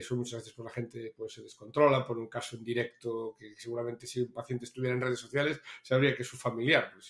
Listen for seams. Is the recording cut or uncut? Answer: uncut